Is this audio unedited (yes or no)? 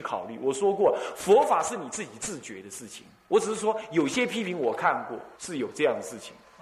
no